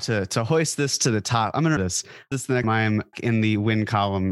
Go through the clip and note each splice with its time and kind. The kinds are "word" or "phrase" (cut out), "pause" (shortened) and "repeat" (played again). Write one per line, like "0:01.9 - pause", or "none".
0:01.8 - word
0:02.3 - phrase
0:02.6 - word
0:03.1 - word